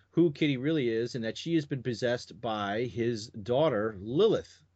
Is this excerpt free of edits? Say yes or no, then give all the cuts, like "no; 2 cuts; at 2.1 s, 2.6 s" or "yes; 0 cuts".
yes; 0 cuts